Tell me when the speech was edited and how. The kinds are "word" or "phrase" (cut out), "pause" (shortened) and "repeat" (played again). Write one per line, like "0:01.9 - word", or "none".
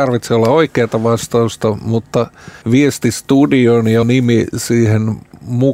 0:02.6 - pause
0:04.0 - word